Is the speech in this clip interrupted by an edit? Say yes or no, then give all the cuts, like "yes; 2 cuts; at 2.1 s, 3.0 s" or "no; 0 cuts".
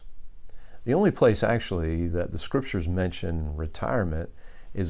no; 0 cuts